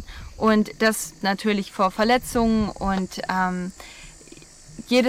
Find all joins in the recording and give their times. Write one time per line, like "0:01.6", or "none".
0:01.2